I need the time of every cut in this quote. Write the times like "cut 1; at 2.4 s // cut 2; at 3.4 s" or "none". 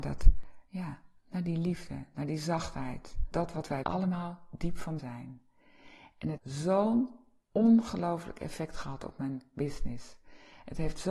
cut 1; at 3.3 s // cut 2; at 3.8 s // cut 3; at 5.0 s // cut 4; at 6.4 s